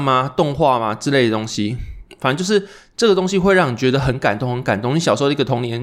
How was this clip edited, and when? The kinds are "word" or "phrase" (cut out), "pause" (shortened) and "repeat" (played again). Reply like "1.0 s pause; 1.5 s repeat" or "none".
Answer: none